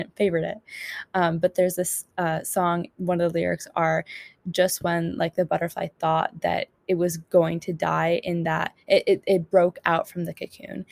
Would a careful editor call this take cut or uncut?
uncut